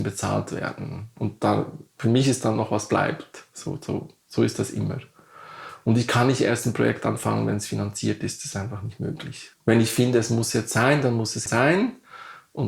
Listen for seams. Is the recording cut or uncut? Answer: cut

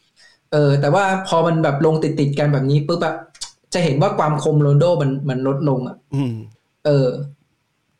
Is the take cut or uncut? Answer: cut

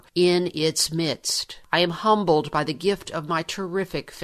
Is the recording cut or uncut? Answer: uncut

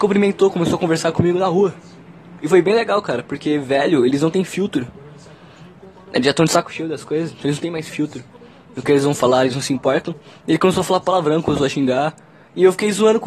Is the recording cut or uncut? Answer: uncut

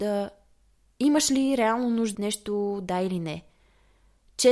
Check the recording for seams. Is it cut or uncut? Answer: cut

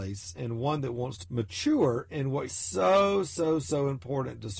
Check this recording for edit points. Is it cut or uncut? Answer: cut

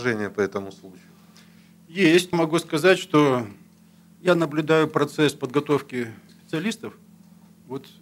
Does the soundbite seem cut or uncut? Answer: cut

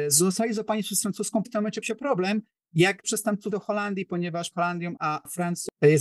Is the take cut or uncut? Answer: cut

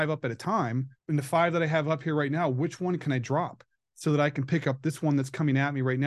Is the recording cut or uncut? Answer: cut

